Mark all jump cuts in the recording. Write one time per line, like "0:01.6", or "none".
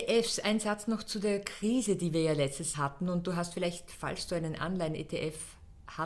0:02.7

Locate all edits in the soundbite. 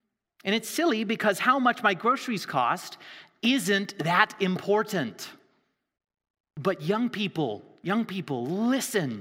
0:06.0

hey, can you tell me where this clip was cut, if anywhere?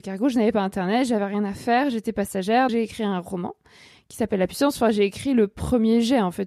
0:02.7

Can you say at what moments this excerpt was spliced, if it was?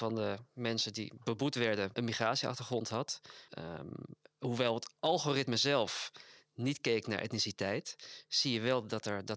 0:01.9
0:03.5

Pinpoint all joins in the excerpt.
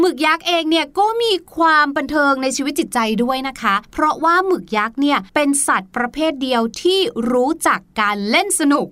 0:03.8
0:05.3

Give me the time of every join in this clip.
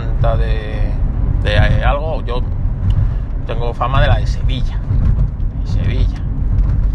none

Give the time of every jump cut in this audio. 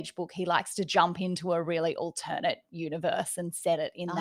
none

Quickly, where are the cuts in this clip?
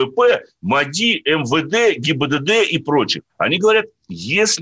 0:03.3

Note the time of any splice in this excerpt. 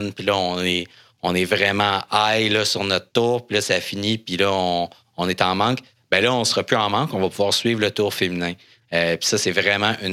none

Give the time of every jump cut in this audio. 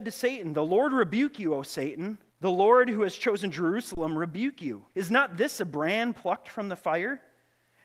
0:02.3
0:04.9

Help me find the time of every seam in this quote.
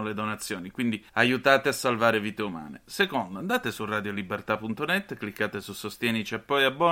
0:01.1

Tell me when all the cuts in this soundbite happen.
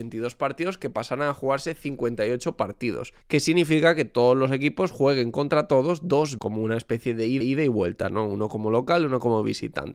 0:03.2
0:06.4
0:07.4

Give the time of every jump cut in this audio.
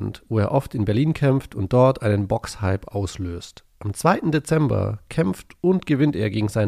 none

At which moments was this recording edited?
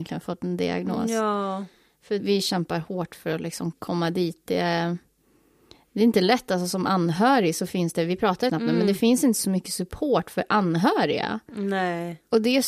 0:02.2
0:03.7
0:08.5

